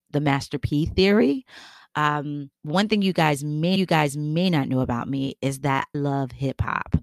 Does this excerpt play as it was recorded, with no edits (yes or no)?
no